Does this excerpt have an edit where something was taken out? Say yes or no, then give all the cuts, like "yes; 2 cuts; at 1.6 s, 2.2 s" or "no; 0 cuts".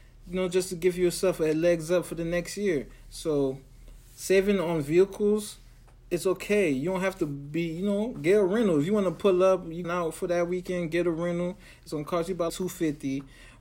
yes; 2 cuts; at 9.8 s, 12.5 s